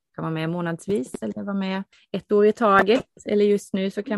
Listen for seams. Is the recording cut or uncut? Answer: cut